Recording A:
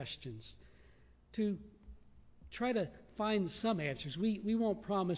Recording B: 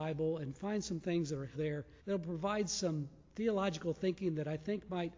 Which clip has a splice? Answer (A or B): B